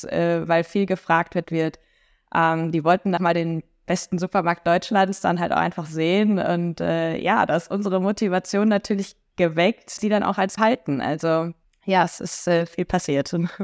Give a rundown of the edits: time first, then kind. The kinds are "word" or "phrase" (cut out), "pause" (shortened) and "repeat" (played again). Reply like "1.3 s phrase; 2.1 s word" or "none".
1.4 s phrase; 3.2 s word; 10.0 s word; 10.6 s phrase; 11.6 s pause

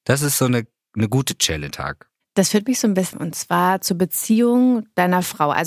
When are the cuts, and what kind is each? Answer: 1.7 s word; 3.1 s phrase

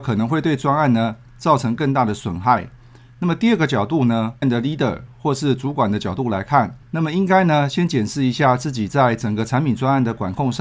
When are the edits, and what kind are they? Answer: 4.4 s phrase; 6.8 s pause

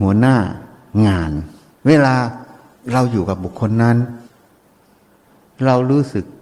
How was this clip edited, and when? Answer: 1.7 s pause

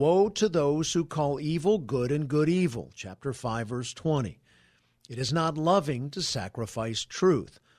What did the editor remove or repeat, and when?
none

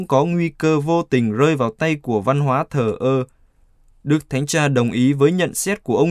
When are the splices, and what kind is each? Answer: none

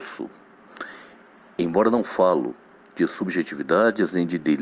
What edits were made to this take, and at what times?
none

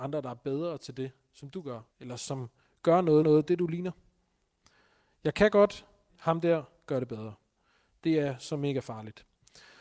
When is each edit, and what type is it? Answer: 1.9 s pause; 3.2 s repeat; 6.1 s word

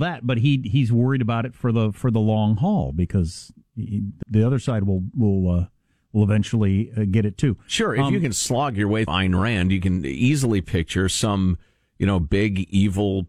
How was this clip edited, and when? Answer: 3.6 s word; 4.2 s word; 9.1 s word

